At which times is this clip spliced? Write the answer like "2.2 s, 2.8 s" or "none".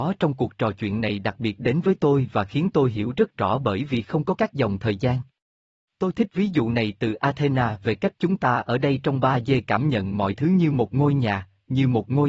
none

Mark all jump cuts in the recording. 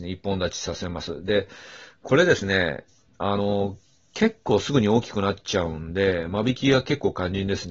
none

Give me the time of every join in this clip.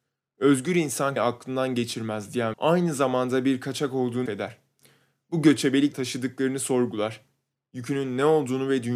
1.2 s, 2.5 s, 4.3 s, 5.9 s

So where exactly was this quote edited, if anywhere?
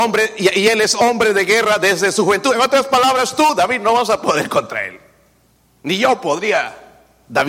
none

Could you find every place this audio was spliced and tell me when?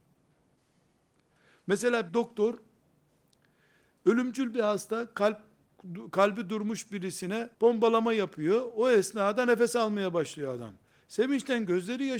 2.1 s, 7.5 s

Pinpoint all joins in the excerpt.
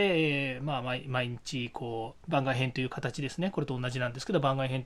2.2 s

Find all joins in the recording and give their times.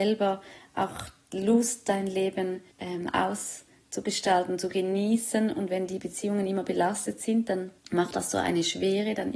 2.7 s, 7.8 s

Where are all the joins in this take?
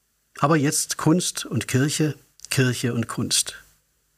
none

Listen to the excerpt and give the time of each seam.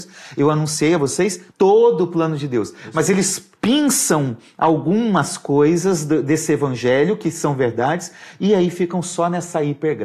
1.5 s, 3.5 s

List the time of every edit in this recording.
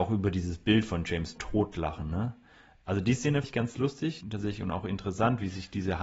1.4 s, 3.4 s, 4.2 s

